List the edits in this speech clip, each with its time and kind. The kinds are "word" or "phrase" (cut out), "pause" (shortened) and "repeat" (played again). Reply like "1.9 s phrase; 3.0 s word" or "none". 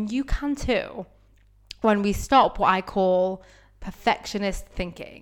none